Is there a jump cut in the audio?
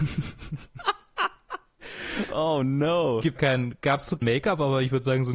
yes; 2 cuts; at 3.4 s, 4.2 s

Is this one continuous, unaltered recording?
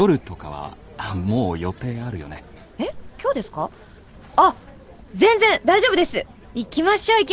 yes; 0 cuts

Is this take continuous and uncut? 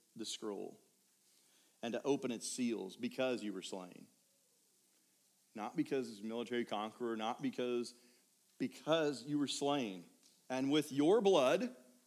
yes; 0 cuts

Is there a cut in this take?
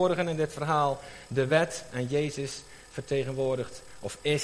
no; 0 cuts

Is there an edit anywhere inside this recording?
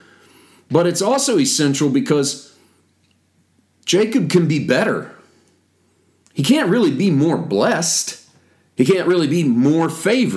no; 0 cuts

